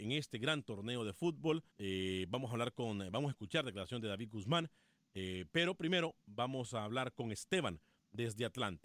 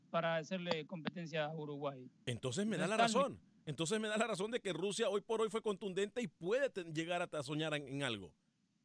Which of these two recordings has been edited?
first; 1 cut; at 1.7 s

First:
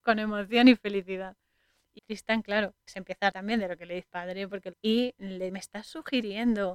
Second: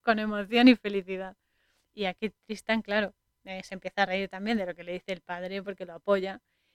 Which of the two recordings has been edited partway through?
first; 6 cuts; at 2.0 s, 2.9 s, 3.3 s, 4.1 s, 4.7 s, 5.5 s

